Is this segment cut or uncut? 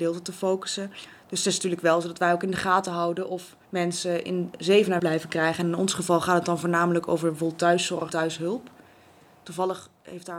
cut